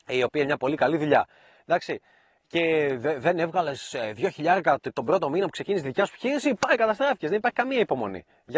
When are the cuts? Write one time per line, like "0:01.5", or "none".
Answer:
none